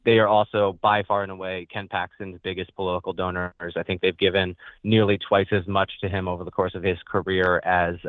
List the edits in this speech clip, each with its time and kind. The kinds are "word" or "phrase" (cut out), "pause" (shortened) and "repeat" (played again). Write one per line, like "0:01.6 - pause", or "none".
none